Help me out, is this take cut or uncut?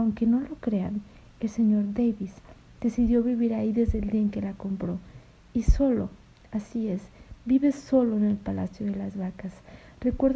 uncut